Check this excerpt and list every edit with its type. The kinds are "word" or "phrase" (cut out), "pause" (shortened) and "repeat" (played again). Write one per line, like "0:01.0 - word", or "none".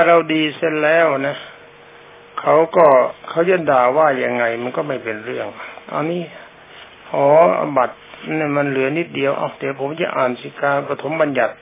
0:03.2 - pause

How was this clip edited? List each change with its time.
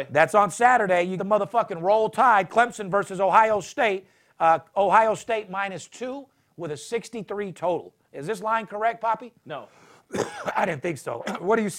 0:01.2 - word

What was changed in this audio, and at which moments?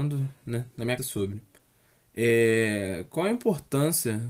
0:01.0 - word

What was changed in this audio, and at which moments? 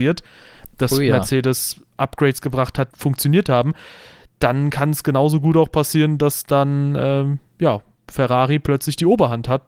0:02.9 - phrase

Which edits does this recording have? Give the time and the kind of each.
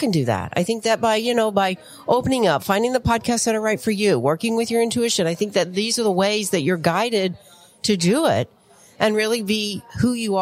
none

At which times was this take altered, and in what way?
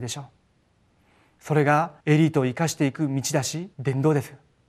0:02.0 - pause
0:03.7 - pause

